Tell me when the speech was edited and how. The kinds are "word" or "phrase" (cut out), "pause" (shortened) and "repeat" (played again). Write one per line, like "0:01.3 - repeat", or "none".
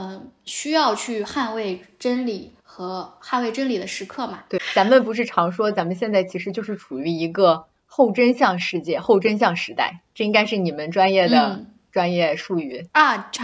0:02.6 - pause